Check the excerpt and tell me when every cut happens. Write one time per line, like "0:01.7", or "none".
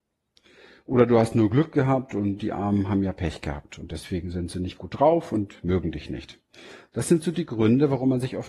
none